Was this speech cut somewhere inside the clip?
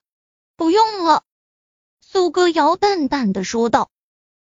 yes; 1 cut; at 1.3 s

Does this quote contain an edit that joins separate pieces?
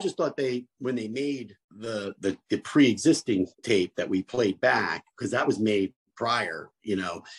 yes; 2 cuts; at 1.6 s, 3.5 s

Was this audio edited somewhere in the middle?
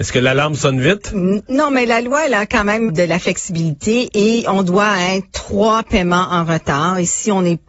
yes; 1 cut; at 2.9 s

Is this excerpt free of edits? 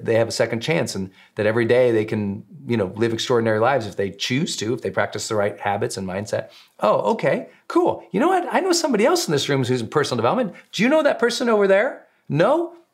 yes; 0 cuts

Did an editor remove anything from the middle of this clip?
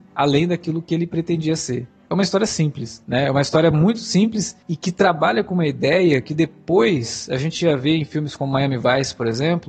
no; 0 cuts

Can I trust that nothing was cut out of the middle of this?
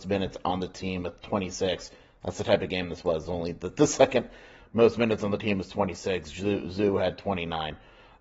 yes; 0 cuts

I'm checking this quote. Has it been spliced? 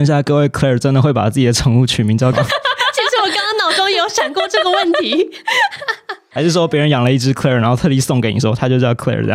yes; 1 cut; at 2.3 s

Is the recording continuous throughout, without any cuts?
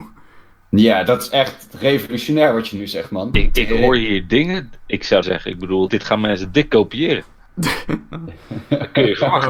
no; 2 cuts; at 5.2 s, 5.9 s

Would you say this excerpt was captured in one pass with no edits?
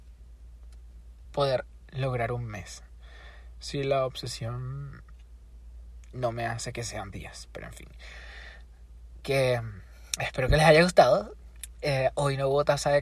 no; 2 cuts; at 1.2 s, 7.1 s

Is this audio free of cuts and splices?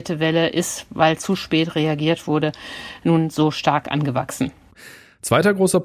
yes; 0 cuts

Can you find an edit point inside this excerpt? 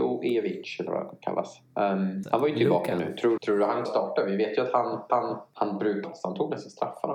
yes; 5 cuts; at 2.2 s, 3.4 s, 3.8 s, 5.1 s, 6.0 s

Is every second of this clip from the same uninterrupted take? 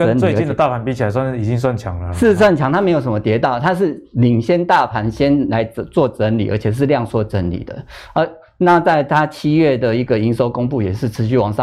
yes; 0 cuts

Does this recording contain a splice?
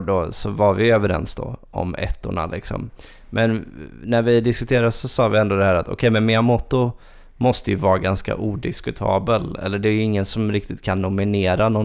no; 0 cuts

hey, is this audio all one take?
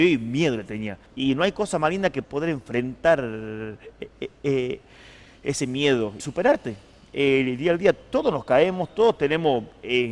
no; 3 cuts; at 1.1 s, 2.2 s, 6.2 s

